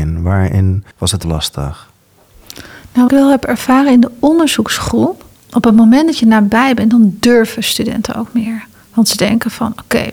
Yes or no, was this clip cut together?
yes